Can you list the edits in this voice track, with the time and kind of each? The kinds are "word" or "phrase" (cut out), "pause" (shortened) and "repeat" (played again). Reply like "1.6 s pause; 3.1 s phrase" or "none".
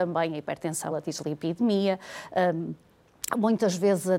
0.9 s word